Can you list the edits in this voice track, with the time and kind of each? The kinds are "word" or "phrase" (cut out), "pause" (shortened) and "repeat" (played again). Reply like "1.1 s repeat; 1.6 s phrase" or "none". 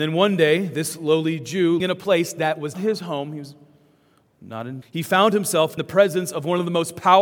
1.8 s word; 2.7 s word; 4.8 s word; 5.8 s word

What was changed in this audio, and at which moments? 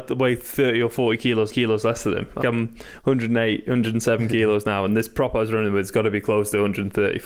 1.5 s repeat; 2.4 s word

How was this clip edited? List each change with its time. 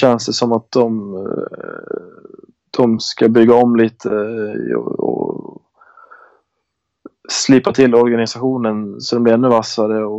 none

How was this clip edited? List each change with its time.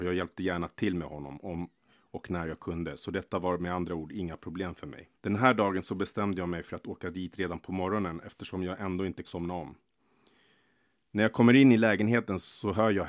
5.1 s pause; 9.2 s word

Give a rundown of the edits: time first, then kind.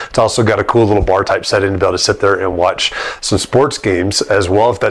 none

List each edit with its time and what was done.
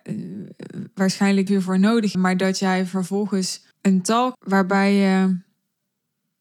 1.5 s phrase; 2.1 s word; 3.7 s pause; 4.3 s word

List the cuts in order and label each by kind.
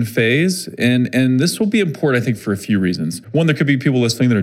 2.4 s word; 3.2 s pause

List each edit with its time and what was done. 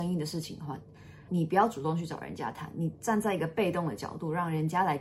1.3 s phrase

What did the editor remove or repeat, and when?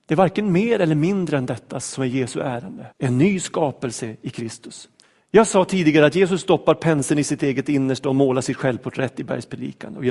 2.9 s pause; 5.0 s pause

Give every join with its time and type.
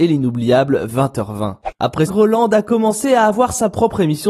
2.1 s word

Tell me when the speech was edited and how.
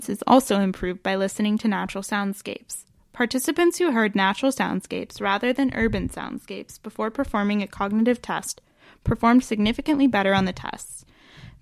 none

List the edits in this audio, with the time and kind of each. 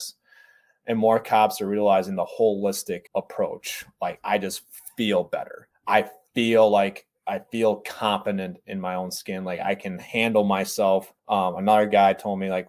3.1 s pause; 5.7 s pause; 11.2 s pause

